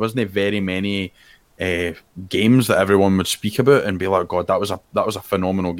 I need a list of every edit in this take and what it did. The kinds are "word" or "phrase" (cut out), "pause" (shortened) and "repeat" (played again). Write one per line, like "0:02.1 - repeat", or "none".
none